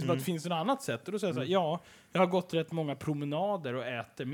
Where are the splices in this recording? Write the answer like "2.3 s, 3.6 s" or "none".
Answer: none